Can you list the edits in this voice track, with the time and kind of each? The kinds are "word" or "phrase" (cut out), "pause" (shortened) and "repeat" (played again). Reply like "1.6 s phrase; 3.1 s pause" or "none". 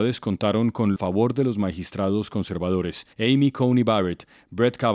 1.0 s phrase; 3.1 s pause